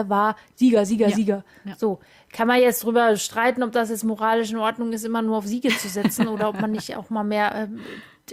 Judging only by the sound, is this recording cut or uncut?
uncut